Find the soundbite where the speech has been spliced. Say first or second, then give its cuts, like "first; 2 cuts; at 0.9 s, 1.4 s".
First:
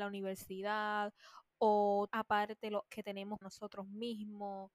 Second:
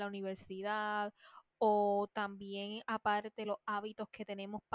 first; 3 cuts; at 2.1 s, 2.9 s, 3.4 s